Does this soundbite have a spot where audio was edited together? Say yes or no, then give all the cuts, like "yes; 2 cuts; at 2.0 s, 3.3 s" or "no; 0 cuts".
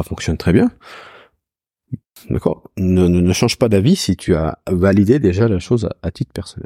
no; 0 cuts